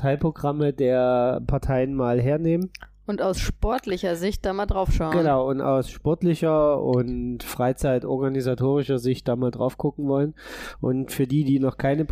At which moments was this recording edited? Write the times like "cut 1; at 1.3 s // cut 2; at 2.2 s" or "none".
none

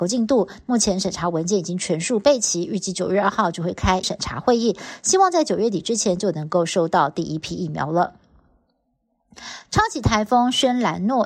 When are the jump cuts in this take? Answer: cut 1; at 4.0 s

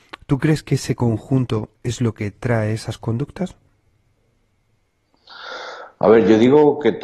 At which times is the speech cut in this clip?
none

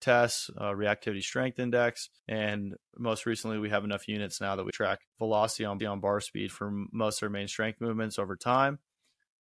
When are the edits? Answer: cut 1; at 2.2 s // cut 2; at 4.7 s // cut 3; at 5.1 s // cut 4; at 5.8 s

